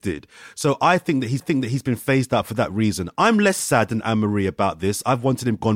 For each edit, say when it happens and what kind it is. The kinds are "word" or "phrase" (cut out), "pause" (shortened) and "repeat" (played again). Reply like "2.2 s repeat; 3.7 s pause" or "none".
1.4 s repeat